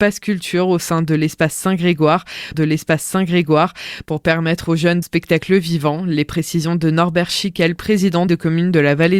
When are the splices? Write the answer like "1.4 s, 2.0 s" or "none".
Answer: 2.5 s, 5.0 s, 8.3 s